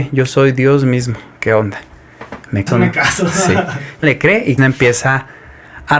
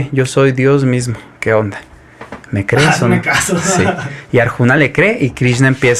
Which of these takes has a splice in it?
first; 3 cuts; at 2.7 s, 4.0 s, 4.6 s

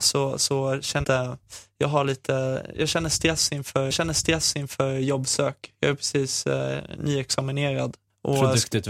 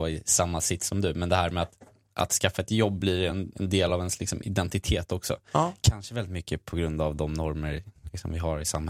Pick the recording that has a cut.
first; 3 cuts; at 1.0 s, 2.7 s, 3.9 s

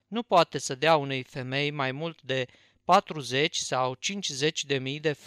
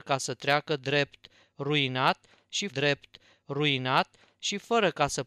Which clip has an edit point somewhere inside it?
second; 1 cut; at 2.7 s

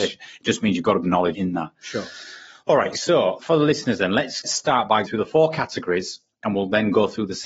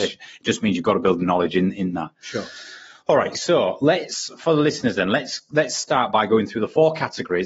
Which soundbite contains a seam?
first; 5 cuts; at 1.0 s, 1.3 s, 3.4 s, 4.4 s, 5.0 s

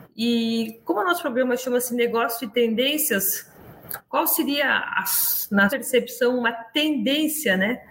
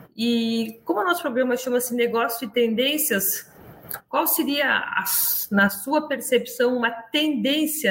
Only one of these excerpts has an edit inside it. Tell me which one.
first; 1 cut; at 5.7 s

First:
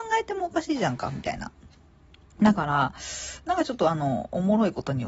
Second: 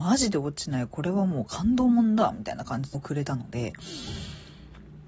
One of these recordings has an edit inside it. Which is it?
second; 1 cut; at 2.9 s

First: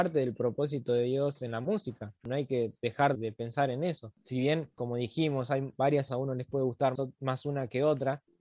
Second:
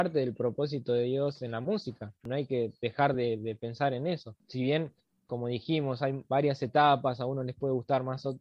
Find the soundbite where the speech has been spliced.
first; 4 cuts; at 3.1 s, 4.7 s, 6.1 s, 6.9 s

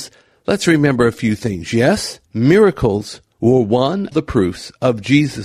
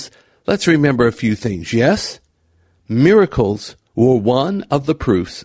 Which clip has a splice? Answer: first; 2 cuts; at 2.3 s, 4.1 s

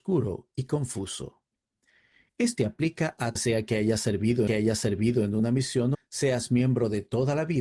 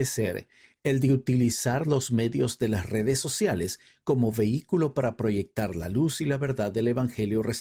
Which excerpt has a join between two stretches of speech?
first; 4 cuts; at 2.6 s, 3.4 s, 4.5 s, 5.9 s

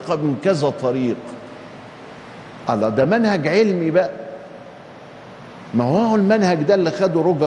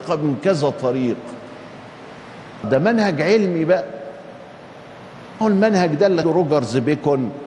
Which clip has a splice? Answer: second; 3 cuts; at 2.6 s, 5.4 s, 6.2 s

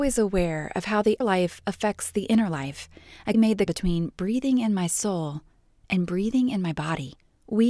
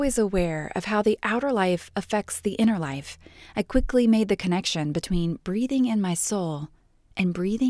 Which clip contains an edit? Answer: first; 3 cuts; at 1.2 s, 3.3 s, 3.7 s

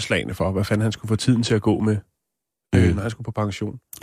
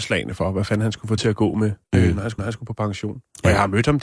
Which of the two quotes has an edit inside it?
second; 3 cuts; at 1.2 s, 1.8 s, 2.4 s

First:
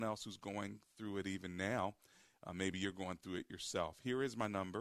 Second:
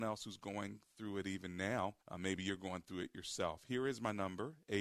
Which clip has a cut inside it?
second; 1 cut; at 2.0 s

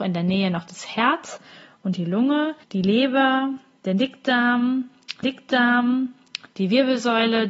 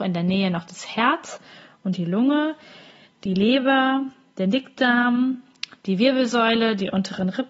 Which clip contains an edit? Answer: first; 2 cuts; at 2.6 s, 5.2 s

